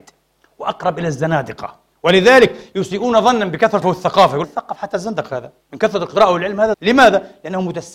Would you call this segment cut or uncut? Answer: cut